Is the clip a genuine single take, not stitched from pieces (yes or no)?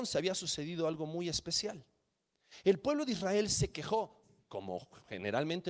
yes